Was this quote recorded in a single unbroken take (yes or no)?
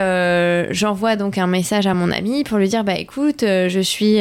yes